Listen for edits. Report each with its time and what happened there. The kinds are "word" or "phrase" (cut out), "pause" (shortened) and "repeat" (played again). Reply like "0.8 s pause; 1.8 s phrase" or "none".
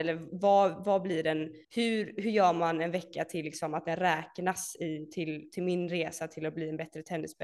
1.6 s pause

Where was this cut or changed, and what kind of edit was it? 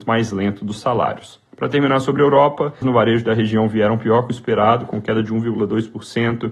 1.5 s pause; 2.8 s word

